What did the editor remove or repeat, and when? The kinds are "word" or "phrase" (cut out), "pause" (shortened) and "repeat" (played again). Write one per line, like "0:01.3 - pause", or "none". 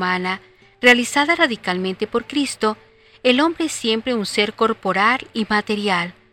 none